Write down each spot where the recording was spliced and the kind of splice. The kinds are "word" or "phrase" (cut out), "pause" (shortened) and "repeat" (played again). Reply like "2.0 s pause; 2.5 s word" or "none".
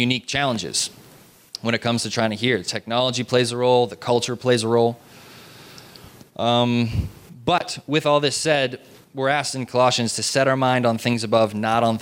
none